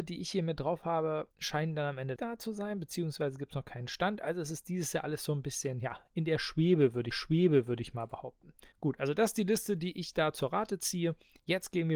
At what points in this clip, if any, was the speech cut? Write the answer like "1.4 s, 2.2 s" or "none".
1.3 s, 2.2 s, 7.1 s, 8.7 s

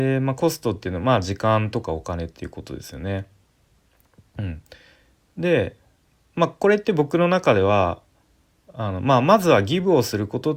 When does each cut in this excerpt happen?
none

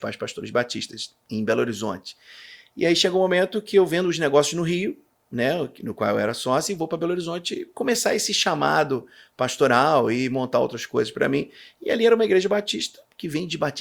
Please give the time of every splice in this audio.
none

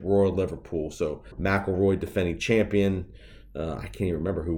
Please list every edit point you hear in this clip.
1.3 s

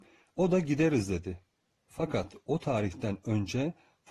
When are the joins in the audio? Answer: none

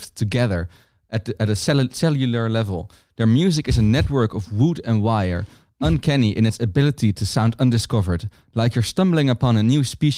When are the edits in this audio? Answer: none

